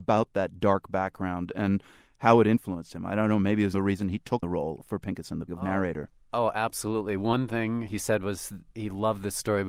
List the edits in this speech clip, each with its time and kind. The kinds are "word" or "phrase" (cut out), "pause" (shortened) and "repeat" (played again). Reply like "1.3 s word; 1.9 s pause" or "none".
3.7 s word; 4.4 s word; 5.5 s word